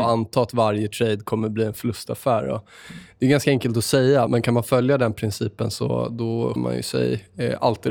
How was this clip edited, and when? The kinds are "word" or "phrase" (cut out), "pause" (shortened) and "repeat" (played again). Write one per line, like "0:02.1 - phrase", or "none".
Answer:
0:04.3 - word
0:06.6 - word